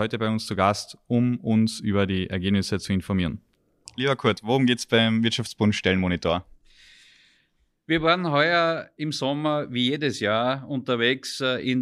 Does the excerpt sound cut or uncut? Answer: uncut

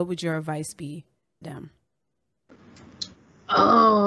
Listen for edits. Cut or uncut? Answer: cut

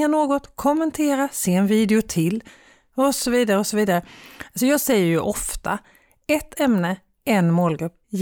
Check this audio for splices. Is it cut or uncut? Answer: uncut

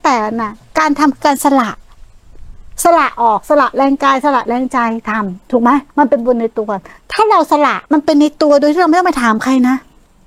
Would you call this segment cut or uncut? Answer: cut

